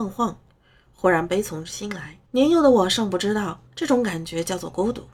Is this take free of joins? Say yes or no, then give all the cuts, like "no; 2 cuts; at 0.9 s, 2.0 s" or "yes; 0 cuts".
no; 2 cuts; at 2.3 s, 3.7 s